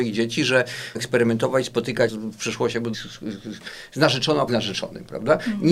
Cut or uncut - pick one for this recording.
cut